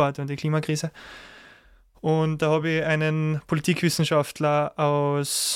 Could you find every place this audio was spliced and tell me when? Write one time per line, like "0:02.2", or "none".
none